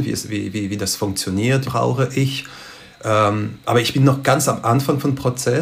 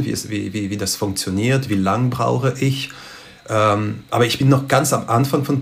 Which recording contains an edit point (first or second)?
first